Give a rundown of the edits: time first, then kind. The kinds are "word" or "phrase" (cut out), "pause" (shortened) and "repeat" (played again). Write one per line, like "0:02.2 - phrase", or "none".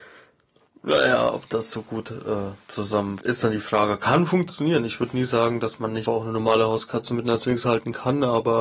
0:03.2 - word
0:06.1 - word